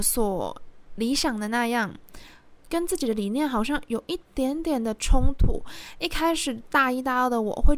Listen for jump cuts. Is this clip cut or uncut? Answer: cut